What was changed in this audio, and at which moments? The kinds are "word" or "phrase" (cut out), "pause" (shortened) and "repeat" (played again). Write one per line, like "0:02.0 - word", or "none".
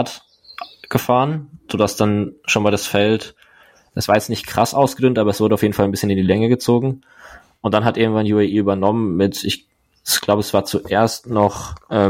none